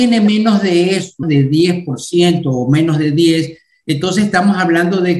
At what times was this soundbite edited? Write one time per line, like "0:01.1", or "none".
0:01.2